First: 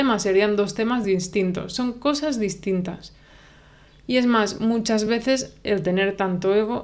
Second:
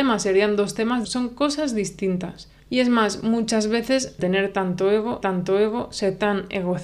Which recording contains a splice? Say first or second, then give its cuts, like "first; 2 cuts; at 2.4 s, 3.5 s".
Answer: second; 4 cuts; at 1.0 s, 2.6 s, 4.2 s, 5.2 s